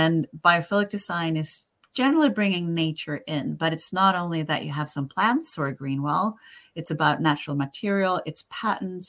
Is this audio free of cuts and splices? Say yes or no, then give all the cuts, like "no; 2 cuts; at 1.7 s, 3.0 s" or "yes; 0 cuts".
yes; 0 cuts